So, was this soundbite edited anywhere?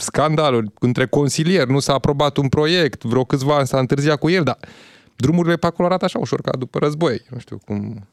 no; 0 cuts

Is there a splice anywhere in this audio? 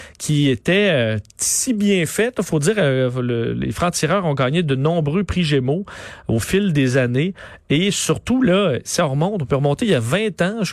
yes; 1 cut; at 1.3 s

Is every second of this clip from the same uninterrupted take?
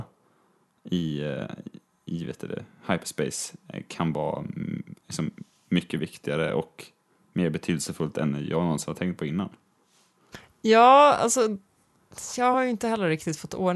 yes; 0 cuts

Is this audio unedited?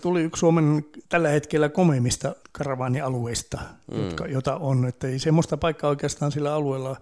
no; 2 cuts; at 1.0 s, 2.4 s

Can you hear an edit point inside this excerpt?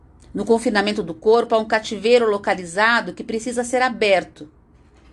no; 0 cuts

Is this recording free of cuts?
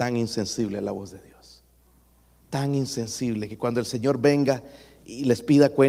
yes; 0 cuts

